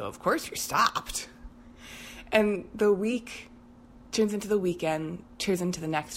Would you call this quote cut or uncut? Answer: uncut